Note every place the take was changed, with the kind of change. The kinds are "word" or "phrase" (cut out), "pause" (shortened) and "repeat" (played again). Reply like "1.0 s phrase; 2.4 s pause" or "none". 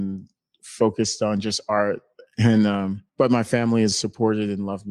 3.1 s pause; 3.9 s word

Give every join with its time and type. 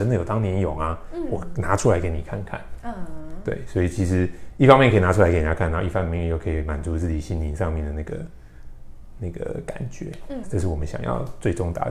10.4 s phrase

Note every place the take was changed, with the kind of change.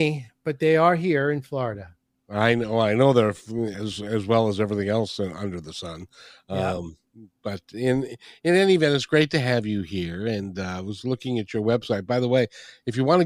none

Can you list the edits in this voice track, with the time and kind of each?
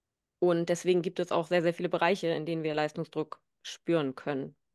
none

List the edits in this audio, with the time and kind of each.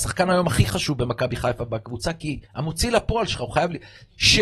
2.4 s pause

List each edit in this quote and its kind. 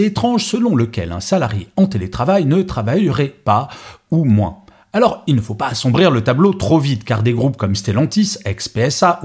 none

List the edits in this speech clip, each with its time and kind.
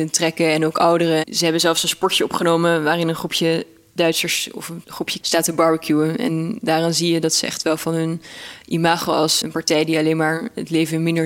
5.2 s word; 9.4 s word

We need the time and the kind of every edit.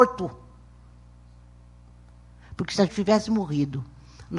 2.9 s word

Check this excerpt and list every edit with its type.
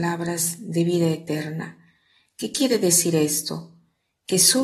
none

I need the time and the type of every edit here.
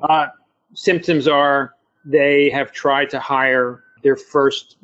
none

